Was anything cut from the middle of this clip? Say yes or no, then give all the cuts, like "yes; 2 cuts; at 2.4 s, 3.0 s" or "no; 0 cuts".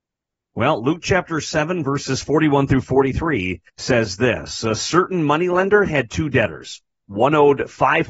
yes; 1 cut; at 3.7 s